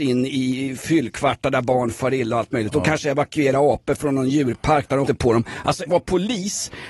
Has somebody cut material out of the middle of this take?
yes; 2 cuts; at 5.1 s, 5.9 s

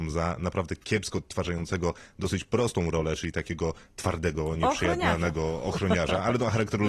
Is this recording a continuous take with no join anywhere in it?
yes; 0 cuts

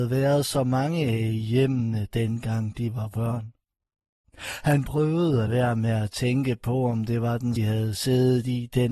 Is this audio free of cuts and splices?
no; 2 cuts; at 5.5 s, 7.6 s

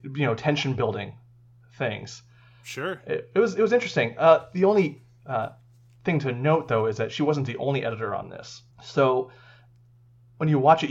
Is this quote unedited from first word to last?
no; 1 cut; at 8.7 s

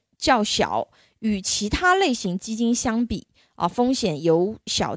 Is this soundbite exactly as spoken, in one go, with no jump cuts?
yes; 0 cuts

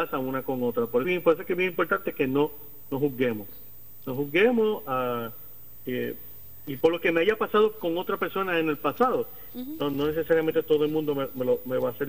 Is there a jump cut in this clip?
yes; 2 cuts; at 1.0 s, 6.8 s

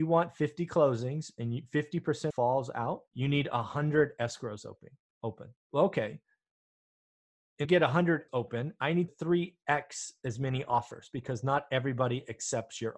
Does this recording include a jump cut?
yes; 6 cuts; at 2.3 s, 3.1 s, 5.6 s, 7.6 s, 8.3 s, 9.1 s

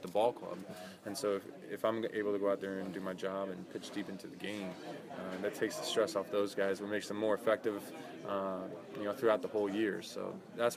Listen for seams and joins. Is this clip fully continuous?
yes; 0 cuts

